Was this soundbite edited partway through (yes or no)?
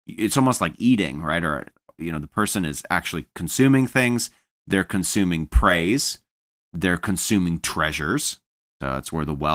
no